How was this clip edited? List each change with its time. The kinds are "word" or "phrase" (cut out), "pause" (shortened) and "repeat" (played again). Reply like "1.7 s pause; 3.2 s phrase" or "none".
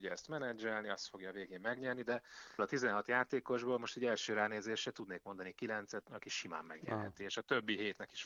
2.6 s word; 6.0 s word